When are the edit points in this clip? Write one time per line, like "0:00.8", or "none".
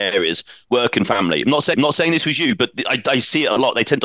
0:01.7